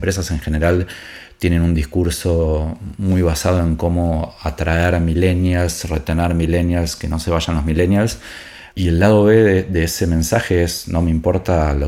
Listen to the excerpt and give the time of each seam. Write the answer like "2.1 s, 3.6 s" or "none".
8.7 s